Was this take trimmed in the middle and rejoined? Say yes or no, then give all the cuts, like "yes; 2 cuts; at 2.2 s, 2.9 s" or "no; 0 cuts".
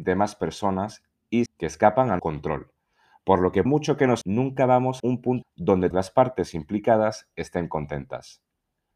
yes; 7 cuts; at 1.5 s, 2.2 s, 3.7 s, 4.2 s, 5.0 s, 5.4 s, 5.9 s